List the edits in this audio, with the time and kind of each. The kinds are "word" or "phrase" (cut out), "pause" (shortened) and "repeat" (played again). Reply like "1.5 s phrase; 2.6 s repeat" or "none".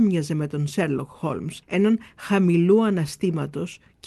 1.6 s pause